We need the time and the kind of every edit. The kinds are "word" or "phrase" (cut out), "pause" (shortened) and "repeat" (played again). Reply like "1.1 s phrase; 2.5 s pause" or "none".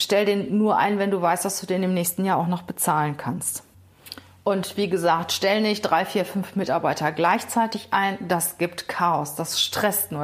none

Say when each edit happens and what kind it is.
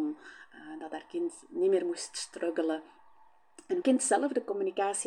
3.8 s word

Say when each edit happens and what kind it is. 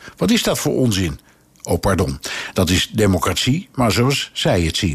none

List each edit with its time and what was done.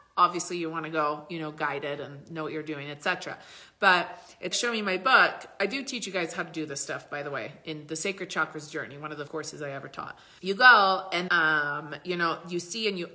4.5 s word; 9.3 s word; 10.4 s word; 11.3 s word

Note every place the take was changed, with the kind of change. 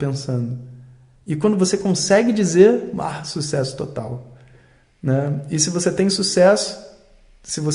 none

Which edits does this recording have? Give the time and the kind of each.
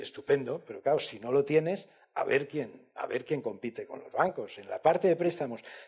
none

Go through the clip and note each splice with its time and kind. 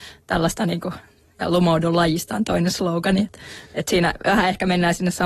none

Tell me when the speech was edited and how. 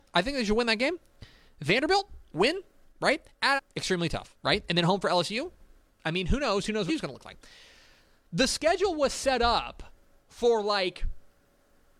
3.6 s word; 6.9 s word

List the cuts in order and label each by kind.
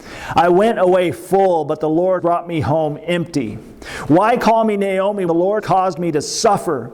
2.2 s word; 5.3 s word; 5.6 s word

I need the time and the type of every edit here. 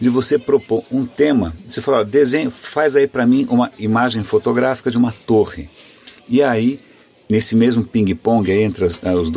none

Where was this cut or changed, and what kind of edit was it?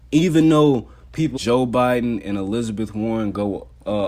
1.4 s word

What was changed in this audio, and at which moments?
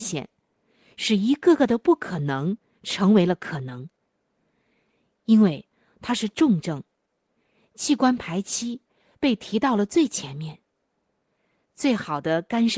none

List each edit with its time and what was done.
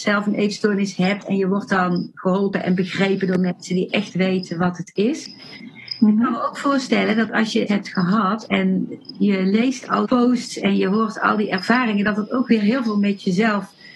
7.7 s word; 8.5 s word; 10.0 s word

